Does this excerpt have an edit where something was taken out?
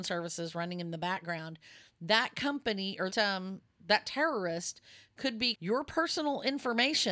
yes; 2 cuts; at 3.1 s, 5.5 s

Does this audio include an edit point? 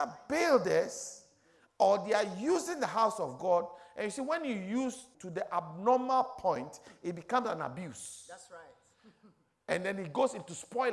yes; 1 cut; at 5.1 s

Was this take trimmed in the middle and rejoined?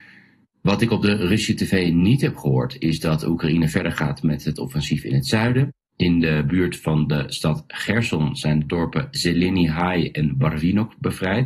no; 0 cuts

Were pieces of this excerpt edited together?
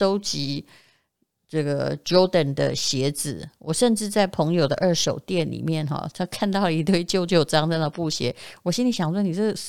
no; 0 cuts

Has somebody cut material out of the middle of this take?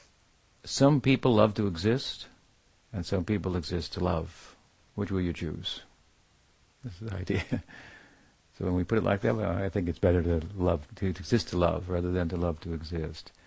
yes; 1 cut; at 10.9 s

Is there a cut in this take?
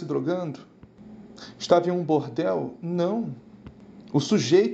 no; 0 cuts

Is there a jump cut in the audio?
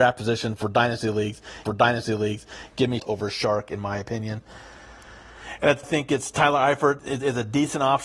yes; 4 cuts; at 1.7 s, 3.0 s, 5.8 s, 7.0 s

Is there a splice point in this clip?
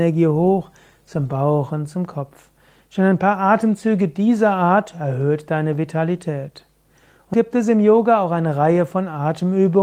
yes; 1 cut; at 7.3 s

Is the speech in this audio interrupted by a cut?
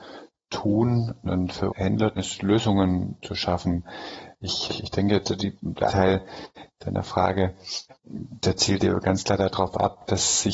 yes; 8 cuts; at 1.2 s, 1.7 s, 2.2 s, 3.2 s, 4.7 s, 5.2 s, 5.9 s, 8.0 s

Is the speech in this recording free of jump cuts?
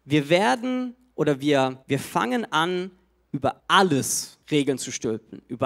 no; 3 cuts; at 1.8 s, 3.6 s, 4.4 s

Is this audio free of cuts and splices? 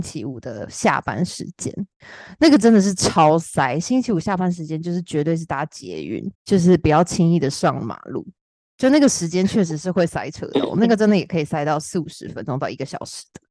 no; 1 cut; at 6.3 s

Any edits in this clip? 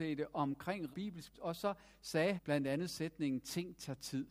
yes; 3 cuts; at 0.9 s, 1.3 s, 2.4 s

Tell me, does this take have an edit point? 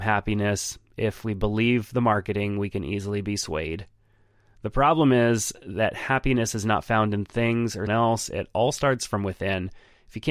yes; 1 cut; at 7.9 s

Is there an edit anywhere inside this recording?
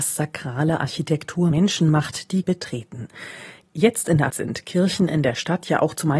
yes; 3 cuts; at 1.5 s, 2.4 s, 4.3 s

